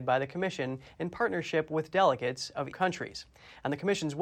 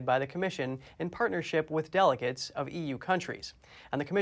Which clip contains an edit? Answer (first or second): first